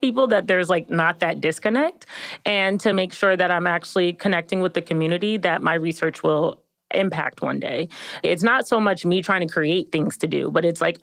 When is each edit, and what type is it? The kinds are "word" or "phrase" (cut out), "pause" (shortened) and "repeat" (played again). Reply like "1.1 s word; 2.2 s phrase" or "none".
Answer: none